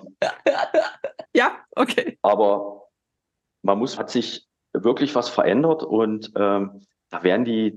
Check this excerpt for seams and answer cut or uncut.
cut